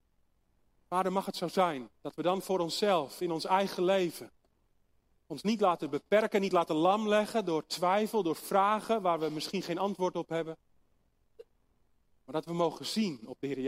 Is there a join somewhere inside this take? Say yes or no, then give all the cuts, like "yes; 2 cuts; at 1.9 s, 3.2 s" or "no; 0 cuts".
yes; 1 cut; at 1.9 s